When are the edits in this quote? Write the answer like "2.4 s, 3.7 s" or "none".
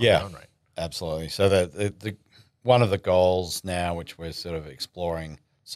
none